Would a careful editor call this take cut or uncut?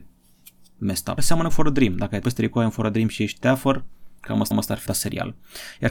cut